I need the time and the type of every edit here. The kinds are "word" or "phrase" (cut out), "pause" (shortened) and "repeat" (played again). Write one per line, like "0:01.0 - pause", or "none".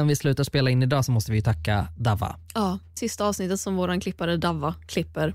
0:03.0 - phrase